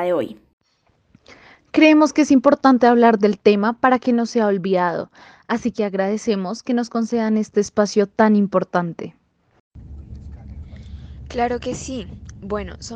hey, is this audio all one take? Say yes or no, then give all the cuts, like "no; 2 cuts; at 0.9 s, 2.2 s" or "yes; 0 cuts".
yes; 0 cuts